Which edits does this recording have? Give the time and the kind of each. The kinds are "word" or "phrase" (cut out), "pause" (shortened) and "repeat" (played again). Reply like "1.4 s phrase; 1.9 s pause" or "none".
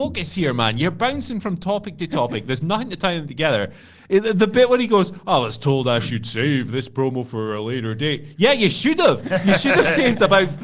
none